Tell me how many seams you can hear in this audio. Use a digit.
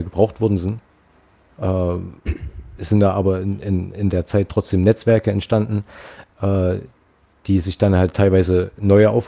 0